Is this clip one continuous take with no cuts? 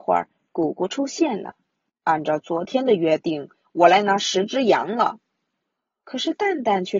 no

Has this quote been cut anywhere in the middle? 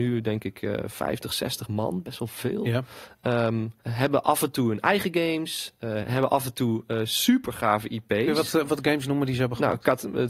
yes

